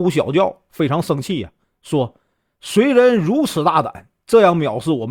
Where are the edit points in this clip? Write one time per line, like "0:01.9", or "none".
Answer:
none